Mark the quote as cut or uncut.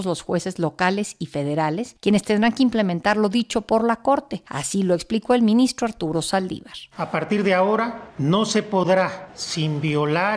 uncut